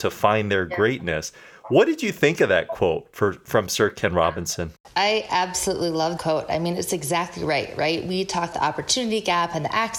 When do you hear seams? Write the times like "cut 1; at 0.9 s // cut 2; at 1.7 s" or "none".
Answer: cut 1; at 6.2 s // cut 2; at 8.5 s